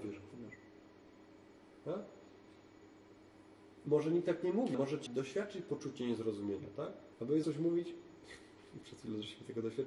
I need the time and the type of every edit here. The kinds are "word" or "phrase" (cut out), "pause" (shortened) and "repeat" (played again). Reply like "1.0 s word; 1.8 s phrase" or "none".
4.7 s word; 5.1 s word; 7.1 s pause; 7.4 s word